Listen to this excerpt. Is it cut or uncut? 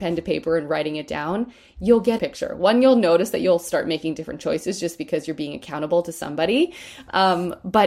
cut